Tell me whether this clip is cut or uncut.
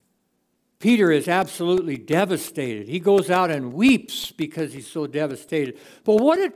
uncut